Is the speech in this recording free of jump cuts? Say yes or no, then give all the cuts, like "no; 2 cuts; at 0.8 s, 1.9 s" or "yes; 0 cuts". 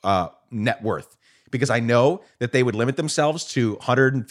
yes; 0 cuts